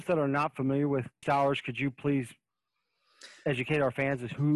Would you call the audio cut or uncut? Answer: cut